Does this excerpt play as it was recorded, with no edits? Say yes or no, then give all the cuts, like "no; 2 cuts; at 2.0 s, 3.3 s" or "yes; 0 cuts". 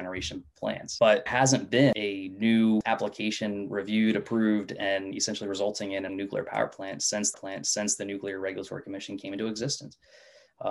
no; 3 cuts; at 1.3 s, 6.1 s, 7.3 s